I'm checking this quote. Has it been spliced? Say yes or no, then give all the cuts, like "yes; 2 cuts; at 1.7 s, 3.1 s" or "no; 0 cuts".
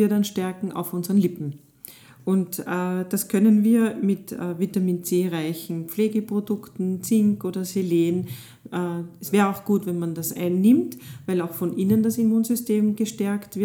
no; 0 cuts